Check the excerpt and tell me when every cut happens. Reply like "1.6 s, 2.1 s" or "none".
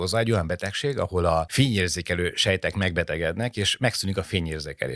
none

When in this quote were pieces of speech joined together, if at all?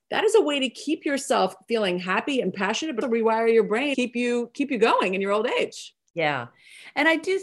3.0 s, 3.9 s

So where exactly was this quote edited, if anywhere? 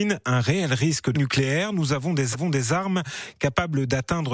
1.1 s, 2.3 s

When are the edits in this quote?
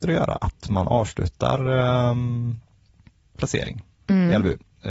none

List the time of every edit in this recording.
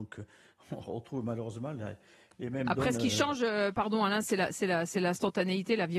none

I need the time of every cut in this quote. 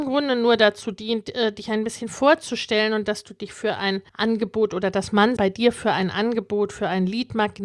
4.1 s, 5.4 s

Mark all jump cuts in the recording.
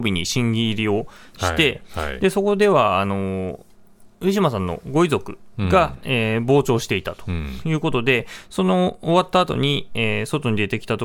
none

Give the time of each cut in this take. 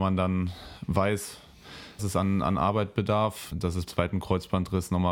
2.0 s, 3.5 s, 3.9 s

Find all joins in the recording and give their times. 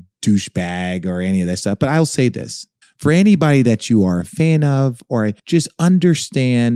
2.8 s, 5.4 s

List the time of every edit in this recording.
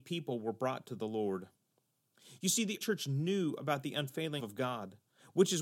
2.8 s, 4.4 s

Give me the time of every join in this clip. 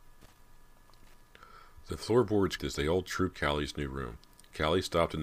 2.6 s, 3.3 s

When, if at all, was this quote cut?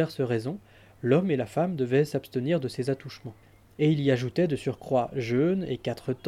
3.4 s

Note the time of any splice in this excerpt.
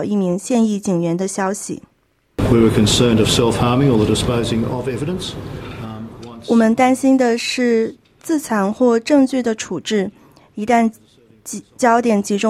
none

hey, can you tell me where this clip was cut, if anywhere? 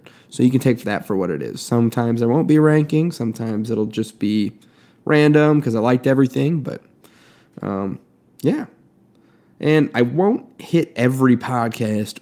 none

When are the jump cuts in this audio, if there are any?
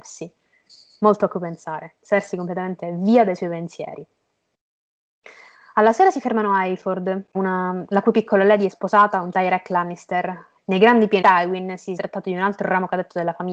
7.3 s, 8.7 s, 9.3 s, 10.6 s, 11.2 s, 12.0 s

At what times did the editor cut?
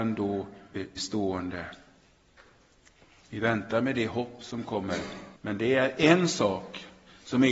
1.0 s, 5.4 s

